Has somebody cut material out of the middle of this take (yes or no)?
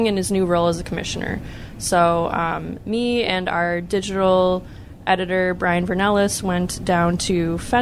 no